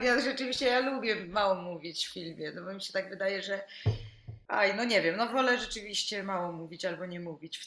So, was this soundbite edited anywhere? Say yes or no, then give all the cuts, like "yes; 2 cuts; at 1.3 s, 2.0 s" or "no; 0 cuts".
yes; 1 cut; at 5.3 s